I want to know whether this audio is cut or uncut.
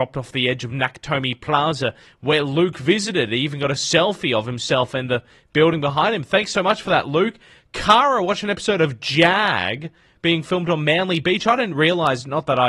uncut